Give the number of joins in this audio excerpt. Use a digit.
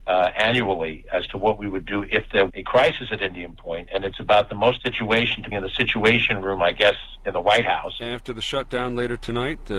3